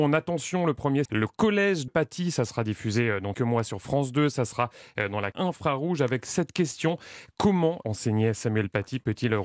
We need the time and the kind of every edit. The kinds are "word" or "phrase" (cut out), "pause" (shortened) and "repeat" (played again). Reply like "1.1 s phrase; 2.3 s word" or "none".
1.1 s word; 1.9 s word; 3.3 s word; 5.3 s word; 7.8 s phrase